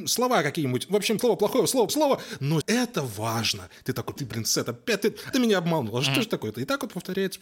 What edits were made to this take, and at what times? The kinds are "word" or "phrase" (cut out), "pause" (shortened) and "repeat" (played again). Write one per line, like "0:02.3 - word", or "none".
0:01.2 - word
0:01.9 - word
0:02.6 - word
0:04.2 - word
0:05.3 - word